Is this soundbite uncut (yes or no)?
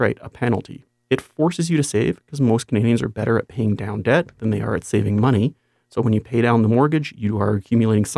yes